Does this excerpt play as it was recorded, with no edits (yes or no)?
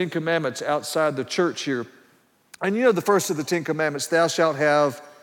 yes